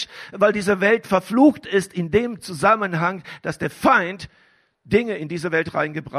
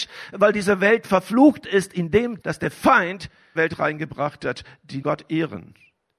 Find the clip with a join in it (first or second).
second